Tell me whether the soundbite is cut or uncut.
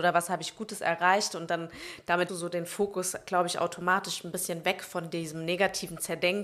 cut